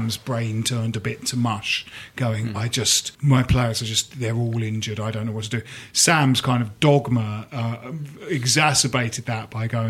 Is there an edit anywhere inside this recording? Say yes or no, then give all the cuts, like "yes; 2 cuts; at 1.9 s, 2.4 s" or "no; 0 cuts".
yes; 1 cut; at 3.1 s